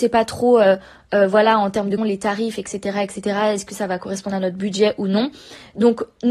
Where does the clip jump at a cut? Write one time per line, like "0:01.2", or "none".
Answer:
0:02.0